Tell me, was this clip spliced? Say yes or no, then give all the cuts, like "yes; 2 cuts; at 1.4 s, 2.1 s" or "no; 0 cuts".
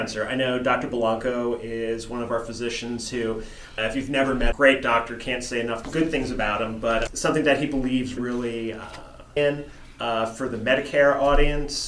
yes; 5 cuts; at 3.8 s, 4.5 s, 7.1 s, 8.2 s, 9.4 s